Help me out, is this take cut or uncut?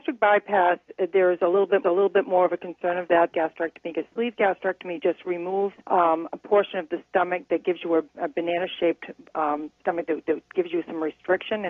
cut